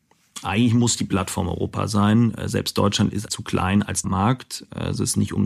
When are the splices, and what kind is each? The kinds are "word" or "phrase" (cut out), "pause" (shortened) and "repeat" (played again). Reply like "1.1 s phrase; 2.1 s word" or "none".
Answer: 3.3 s word; 4.0 s word